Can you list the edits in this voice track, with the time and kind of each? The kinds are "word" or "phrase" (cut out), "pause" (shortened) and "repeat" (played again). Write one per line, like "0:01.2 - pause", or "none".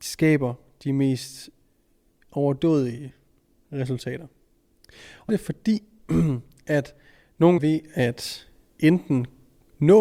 0:05.3 - phrase
0:07.6 - phrase

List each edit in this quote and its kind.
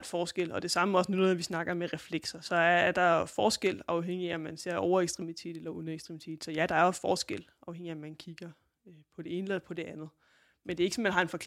none

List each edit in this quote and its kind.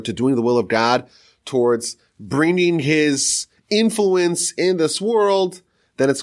none

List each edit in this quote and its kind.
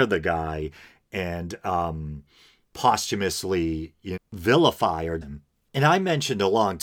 0:04.2 - word
0:05.2 - word

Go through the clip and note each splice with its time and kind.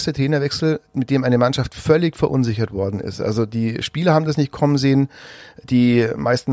none

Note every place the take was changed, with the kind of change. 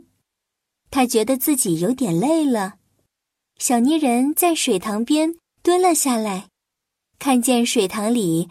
none

